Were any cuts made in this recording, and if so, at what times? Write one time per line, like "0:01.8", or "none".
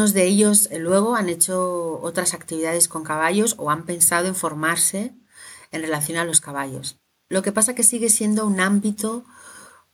none